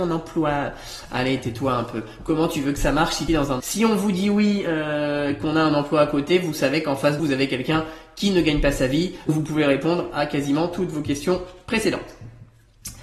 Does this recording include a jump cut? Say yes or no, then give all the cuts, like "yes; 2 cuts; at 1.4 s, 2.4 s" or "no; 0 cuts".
yes; 4 cuts; at 3.3 s, 3.6 s, 7.2 s, 9.3 s